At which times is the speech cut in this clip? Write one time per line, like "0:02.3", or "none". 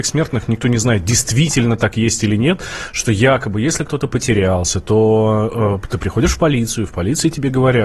none